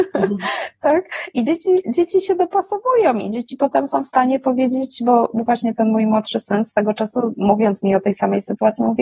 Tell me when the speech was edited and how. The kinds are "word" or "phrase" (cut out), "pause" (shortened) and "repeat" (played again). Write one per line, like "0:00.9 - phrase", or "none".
none